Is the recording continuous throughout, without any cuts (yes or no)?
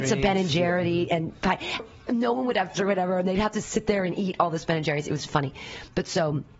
no